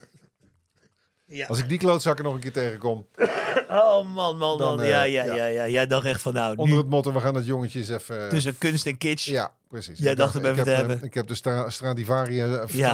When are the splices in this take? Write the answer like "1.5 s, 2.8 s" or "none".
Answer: none